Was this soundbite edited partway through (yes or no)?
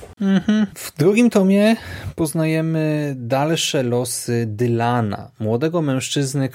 no